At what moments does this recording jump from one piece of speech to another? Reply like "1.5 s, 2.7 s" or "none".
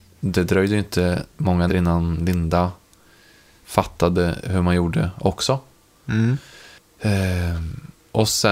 1.7 s